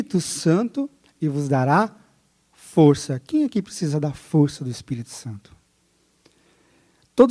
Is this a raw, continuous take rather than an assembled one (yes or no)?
yes